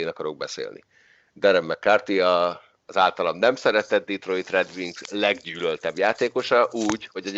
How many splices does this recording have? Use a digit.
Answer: 0